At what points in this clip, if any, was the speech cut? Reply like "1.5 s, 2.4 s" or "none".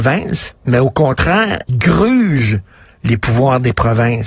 1.7 s